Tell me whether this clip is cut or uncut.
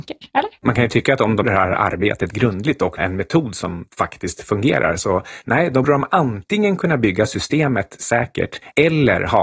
cut